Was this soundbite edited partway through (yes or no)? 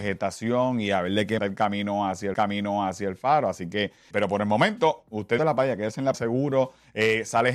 yes